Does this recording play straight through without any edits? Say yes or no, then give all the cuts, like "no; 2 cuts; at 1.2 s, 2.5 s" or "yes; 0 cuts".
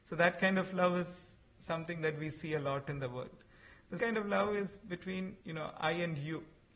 no; 2 cuts; at 4.0 s, 5.4 s